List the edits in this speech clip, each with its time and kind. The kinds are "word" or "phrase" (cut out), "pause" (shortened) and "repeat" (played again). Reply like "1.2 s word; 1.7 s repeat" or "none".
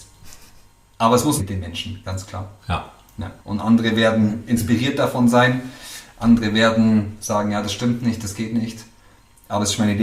1.4 s phrase; 2.6 s pause; 3.4 s pause